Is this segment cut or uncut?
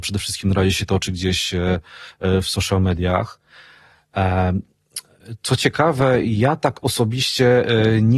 uncut